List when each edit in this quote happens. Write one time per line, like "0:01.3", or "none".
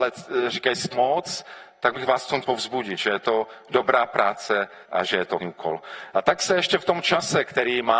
0:00.9
0:01.9
0:02.4
0:04.8
0:05.4